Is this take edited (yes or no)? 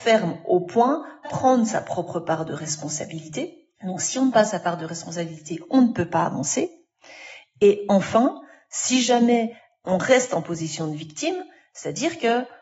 yes